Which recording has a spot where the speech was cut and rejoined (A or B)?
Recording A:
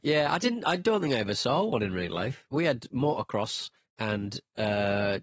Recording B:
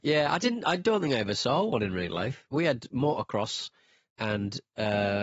A